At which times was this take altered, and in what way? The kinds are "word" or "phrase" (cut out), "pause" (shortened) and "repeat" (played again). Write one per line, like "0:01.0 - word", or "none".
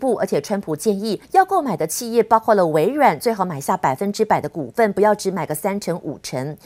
0:01.2 - pause